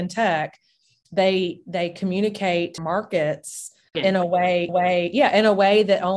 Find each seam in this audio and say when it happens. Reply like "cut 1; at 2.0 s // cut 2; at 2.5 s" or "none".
cut 1; at 2.8 s // cut 2; at 3.9 s // cut 3; at 4.7 s